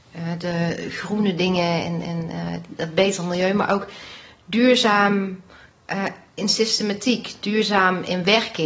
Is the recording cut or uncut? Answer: uncut